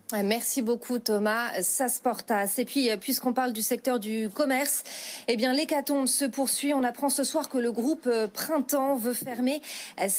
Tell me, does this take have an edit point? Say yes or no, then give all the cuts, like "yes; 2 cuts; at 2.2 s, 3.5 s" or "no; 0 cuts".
no; 0 cuts